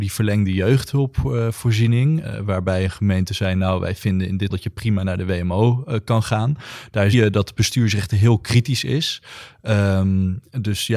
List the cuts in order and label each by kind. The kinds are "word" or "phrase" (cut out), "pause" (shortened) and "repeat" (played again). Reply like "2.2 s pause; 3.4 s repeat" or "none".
2.2 s word; 4.5 s word; 7.1 s word